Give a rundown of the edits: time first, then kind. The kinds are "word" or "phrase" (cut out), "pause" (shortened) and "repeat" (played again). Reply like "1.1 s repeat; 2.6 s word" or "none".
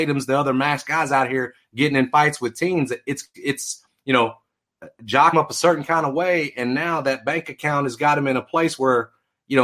5.3 s word